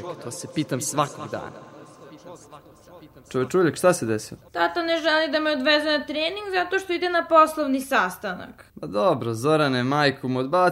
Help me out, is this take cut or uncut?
cut